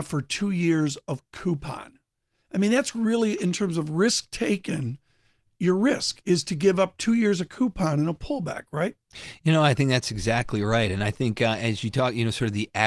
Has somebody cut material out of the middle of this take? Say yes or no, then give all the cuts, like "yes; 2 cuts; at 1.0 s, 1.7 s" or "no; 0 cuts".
no; 0 cuts